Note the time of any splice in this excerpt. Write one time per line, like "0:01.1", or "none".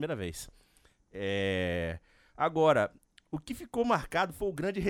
none